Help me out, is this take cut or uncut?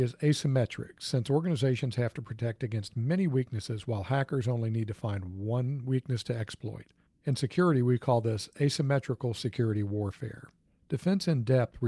uncut